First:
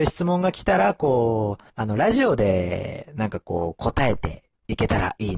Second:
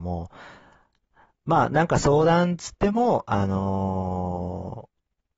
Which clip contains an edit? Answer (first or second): first